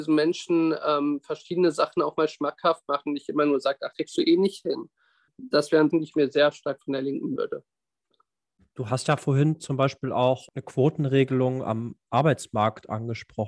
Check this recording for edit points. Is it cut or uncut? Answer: cut